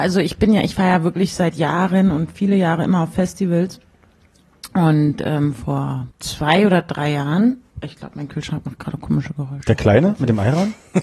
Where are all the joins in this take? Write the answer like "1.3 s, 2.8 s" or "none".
6.1 s, 7.7 s

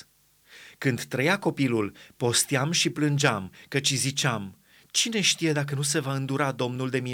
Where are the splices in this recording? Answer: none

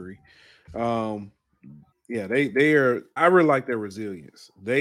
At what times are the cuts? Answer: 1.9 s, 3.2 s

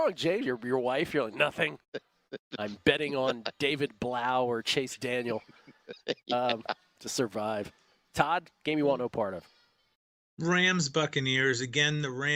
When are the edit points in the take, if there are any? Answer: none

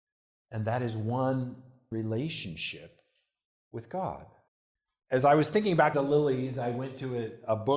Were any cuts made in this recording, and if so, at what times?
1.9 s, 4.5 s, 5.9 s

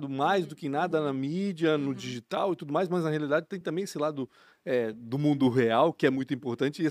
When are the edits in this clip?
none

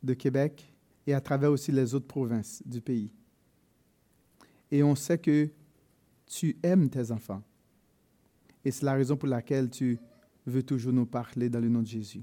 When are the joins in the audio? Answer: 0.9 s

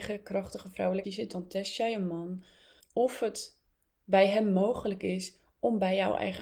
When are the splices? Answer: 1.0 s, 2.8 s

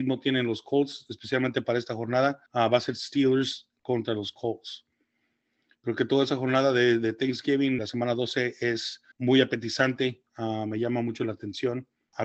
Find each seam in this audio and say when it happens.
2.5 s, 7.8 s, 9.1 s

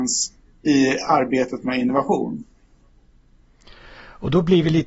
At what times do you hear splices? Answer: none

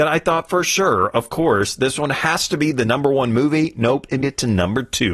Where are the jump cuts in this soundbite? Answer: 4.2 s

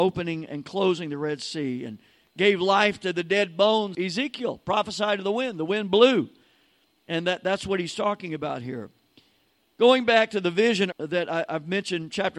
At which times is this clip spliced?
3.9 s, 10.9 s

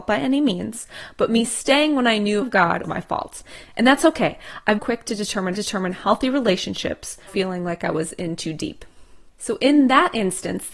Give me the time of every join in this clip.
2.4 s, 2.8 s, 4.8 s, 5.5 s, 7.3 s, 9.3 s

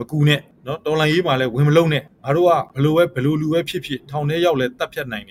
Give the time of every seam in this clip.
2.7 s

